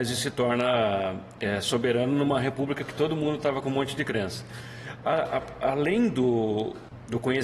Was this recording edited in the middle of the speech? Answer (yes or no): no